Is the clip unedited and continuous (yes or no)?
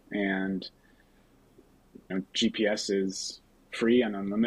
no